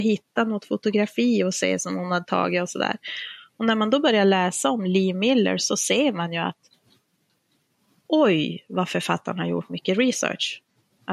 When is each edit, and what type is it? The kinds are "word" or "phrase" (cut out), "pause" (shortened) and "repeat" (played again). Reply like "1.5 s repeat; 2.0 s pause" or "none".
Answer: none